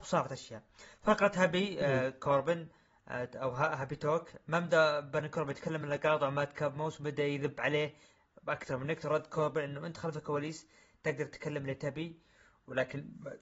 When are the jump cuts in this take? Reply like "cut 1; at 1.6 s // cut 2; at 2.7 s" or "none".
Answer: none